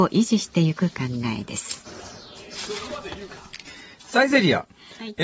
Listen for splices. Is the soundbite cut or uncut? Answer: uncut